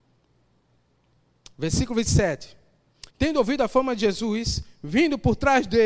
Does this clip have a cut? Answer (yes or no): yes